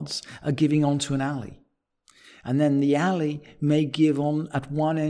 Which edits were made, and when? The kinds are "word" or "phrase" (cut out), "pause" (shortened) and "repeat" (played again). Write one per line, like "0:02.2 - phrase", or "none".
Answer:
none